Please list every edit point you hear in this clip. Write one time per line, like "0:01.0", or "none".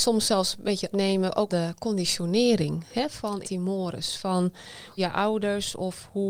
0:00.9
0:01.5
0:03.4
0:05.0

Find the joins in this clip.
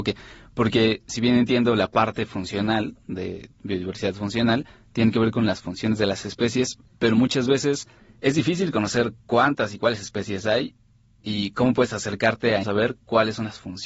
0:12.6

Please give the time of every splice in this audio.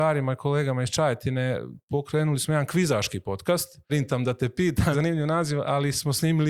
0:01.8
0:03.9
0:04.9

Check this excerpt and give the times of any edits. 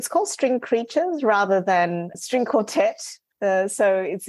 0:02.1

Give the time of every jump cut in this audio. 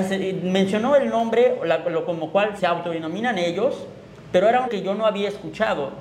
0:02.6
0:04.7

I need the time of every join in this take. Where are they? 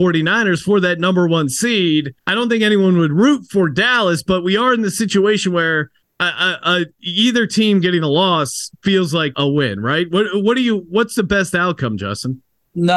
0:02.2
0:06.0
0:09.3

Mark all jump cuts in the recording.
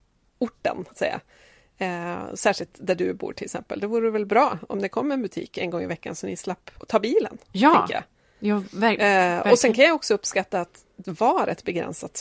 0:00.9
0:11.0

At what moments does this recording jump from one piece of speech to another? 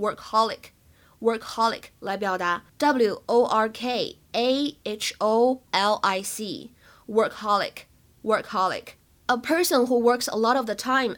0:05.6

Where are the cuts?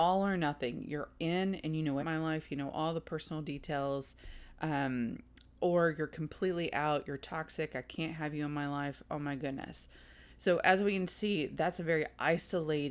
0:02.0
0:10.3

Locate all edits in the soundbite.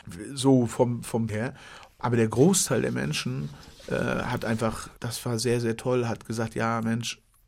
0:01.3
0:05.0

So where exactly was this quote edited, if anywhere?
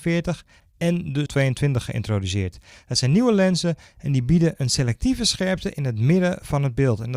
0:01.3

